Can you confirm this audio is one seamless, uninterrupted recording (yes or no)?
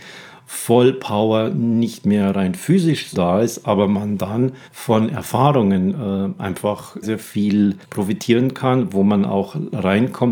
no